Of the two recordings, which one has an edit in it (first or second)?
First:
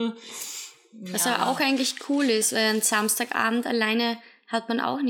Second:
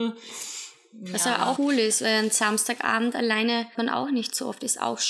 second